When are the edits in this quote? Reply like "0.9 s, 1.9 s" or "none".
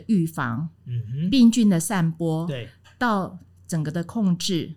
none